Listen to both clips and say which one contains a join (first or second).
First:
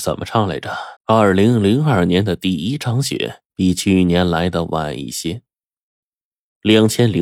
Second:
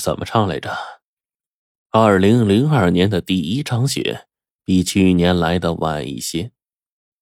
first